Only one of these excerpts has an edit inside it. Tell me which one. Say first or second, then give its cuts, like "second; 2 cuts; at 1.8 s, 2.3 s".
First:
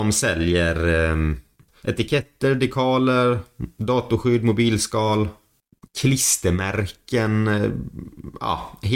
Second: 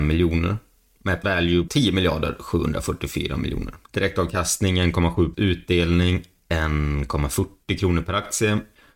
second; 4 cuts; at 1.2 s, 1.7 s, 3.8 s, 5.3 s